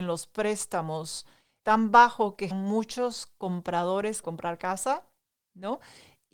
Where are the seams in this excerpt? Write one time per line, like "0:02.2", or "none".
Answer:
0:01.6
0:02.5
0:04.2